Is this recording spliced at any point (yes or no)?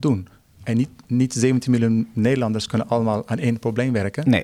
no